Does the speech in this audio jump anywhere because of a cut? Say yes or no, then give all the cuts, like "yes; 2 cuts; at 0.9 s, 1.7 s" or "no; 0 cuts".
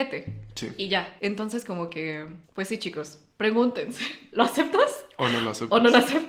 yes; 2 cuts; at 1.2 s, 2.4 s